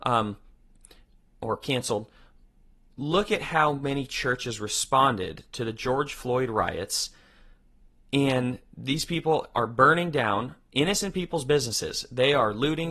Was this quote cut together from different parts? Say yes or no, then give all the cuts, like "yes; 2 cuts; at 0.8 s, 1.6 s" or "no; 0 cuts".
no; 0 cuts